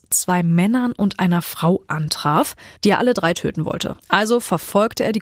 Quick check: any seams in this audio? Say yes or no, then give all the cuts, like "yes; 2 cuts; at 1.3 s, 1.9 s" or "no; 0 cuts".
yes; 2 cuts; at 2.8 s, 4.0 s